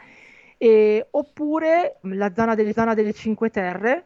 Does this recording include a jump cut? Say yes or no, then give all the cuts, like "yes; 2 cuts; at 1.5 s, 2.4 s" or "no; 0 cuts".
yes; 2 cuts; at 2.0 s, 2.7 s